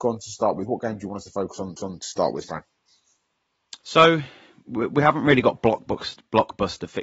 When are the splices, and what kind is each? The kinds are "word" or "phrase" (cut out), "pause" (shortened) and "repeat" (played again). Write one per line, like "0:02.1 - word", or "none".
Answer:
0:01.8 - repeat
0:03.8 - pause